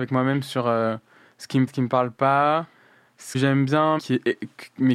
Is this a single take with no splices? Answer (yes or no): no